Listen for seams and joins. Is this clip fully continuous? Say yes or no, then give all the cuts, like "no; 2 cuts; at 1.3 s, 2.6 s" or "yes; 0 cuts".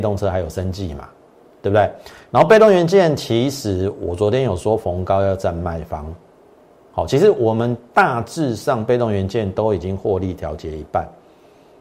yes; 0 cuts